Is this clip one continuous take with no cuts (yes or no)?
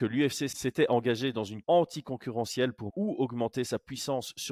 no